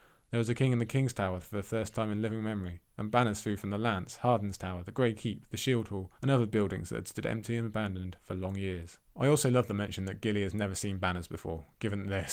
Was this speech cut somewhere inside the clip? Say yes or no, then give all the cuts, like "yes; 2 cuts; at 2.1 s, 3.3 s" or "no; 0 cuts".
yes; 2 cuts; at 6.2 s, 9.1 s